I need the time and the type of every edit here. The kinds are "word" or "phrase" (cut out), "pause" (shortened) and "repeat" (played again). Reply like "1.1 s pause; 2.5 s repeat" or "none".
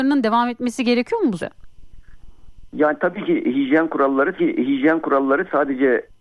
1.4 s word; 4.4 s repeat